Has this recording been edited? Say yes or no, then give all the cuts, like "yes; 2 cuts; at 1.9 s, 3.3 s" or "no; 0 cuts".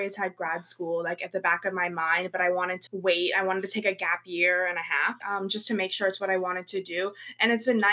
yes; 2 cuts; at 2.9 s, 5.2 s